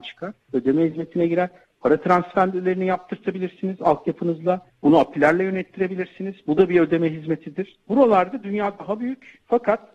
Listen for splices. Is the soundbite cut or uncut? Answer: uncut